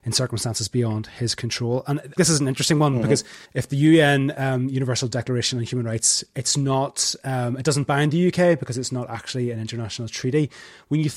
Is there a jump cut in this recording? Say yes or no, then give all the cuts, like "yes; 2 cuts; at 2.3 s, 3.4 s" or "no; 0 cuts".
yes; 2 cuts; at 2.2 s, 3.4 s